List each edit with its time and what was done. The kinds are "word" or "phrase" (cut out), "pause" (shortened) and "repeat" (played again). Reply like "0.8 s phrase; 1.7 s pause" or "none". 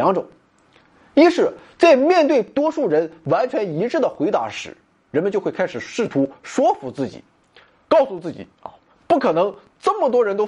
none

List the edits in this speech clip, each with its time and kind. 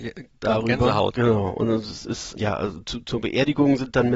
2.4 s word

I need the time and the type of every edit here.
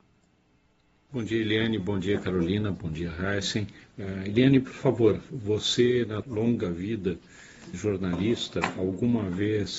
6.2 s word; 7.7 s word

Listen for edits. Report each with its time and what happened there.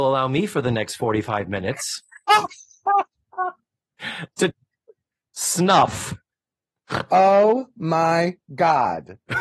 3.1 s pause; 4.5 s phrase

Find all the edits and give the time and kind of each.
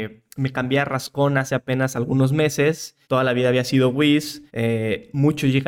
3.0 s pause; 4.5 s pause

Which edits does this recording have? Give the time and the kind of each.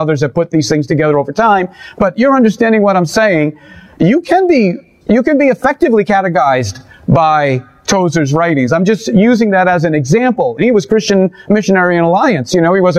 none

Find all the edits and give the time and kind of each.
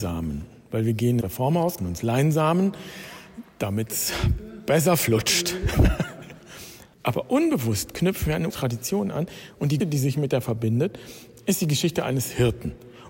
1.2 s word; 1.8 s word; 8.5 s word; 9.8 s word; 10.4 s word

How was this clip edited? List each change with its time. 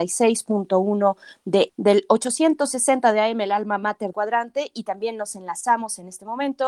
1.7 s word; 4.1 s word

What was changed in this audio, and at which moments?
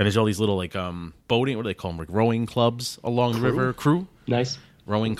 1.2 s pause

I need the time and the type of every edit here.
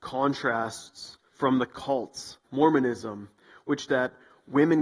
1.3 s pause; 2.4 s word; 3.9 s word

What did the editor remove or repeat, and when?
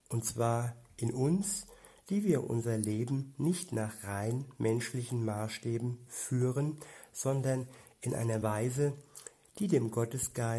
none

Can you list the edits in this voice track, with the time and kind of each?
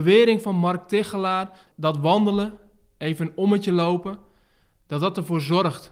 none

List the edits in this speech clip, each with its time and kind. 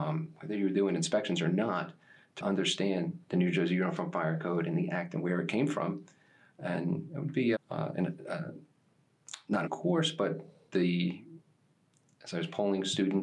2.4 s word; 7.5 s word; 9.7 s word; 10.7 s word

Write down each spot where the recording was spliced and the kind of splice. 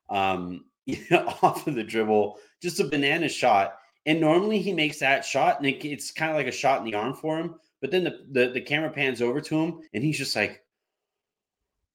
9.9 s pause

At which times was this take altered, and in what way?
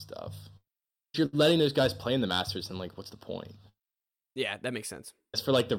none

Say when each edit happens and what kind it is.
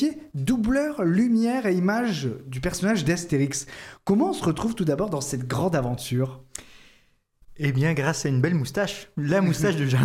none

